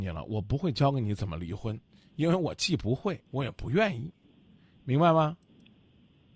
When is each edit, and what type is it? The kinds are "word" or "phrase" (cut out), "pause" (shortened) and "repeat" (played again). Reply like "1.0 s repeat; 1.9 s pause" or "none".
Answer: 3.3 s pause